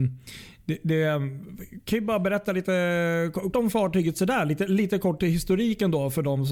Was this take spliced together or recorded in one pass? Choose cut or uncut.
cut